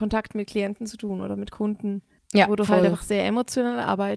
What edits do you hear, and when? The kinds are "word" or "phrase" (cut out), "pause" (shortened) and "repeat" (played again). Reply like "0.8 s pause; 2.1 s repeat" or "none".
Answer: 2.2 s pause